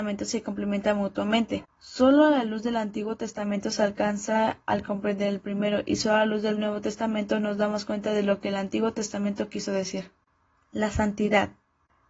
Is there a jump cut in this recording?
no; 0 cuts

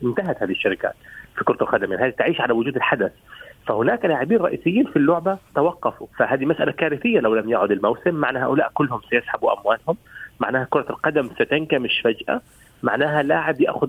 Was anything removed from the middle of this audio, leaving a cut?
yes; 1 cut; at 6.1 s

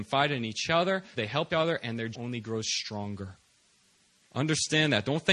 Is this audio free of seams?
no; 3 cuts; at 1.1 s, 1.5 s, 2.1 s

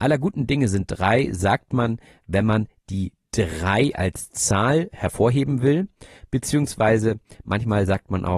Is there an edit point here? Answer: no; 0 cuts

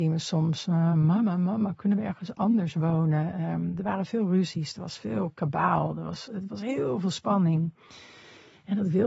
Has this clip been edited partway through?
no; 0 cuts

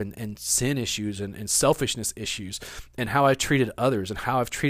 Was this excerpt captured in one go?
yes; 0 cuts

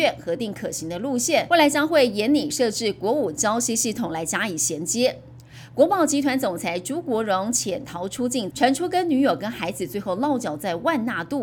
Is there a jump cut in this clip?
yes; 1 cut; at 8.5 s

